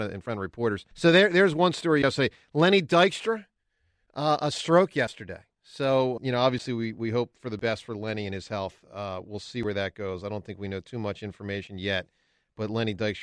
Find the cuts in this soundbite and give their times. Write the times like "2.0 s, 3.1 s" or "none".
0.9 s, 6.2 s